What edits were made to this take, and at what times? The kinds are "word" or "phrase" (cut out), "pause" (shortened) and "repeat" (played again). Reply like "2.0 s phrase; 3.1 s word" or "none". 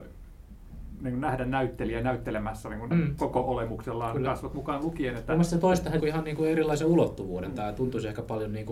2.9 s word; 6.0 s word